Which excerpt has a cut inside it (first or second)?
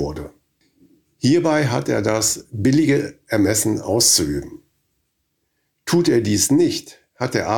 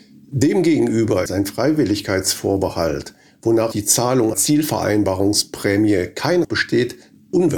second